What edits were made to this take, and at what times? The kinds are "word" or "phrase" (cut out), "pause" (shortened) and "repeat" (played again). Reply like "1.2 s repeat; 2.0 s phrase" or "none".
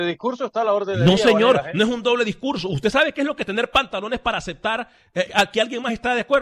5.3 s word

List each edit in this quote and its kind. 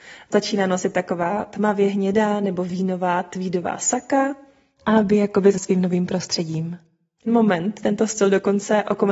5.5 s word; 7.3 s word

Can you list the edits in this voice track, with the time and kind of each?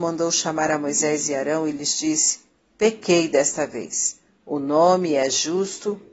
none

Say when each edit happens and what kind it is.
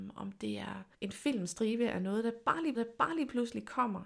0.9 s pause; 2.7 s repeat

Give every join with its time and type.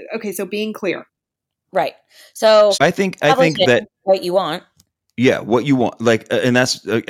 2.7 s word

